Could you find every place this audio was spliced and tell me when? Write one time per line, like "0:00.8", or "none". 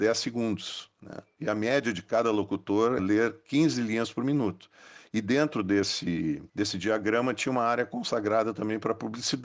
0:03.0
0:06.5